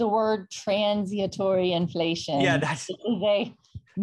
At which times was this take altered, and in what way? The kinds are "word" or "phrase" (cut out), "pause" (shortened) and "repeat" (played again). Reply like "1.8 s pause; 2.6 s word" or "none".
none